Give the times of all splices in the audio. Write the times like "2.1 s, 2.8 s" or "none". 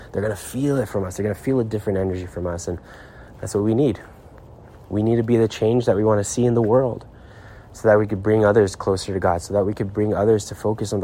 none